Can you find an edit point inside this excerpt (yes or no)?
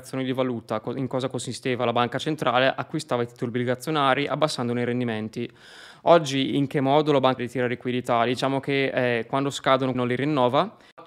yes